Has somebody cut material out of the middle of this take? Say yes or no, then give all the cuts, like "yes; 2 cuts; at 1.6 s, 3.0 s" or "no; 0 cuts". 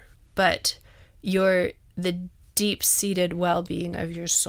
no; 0 cuts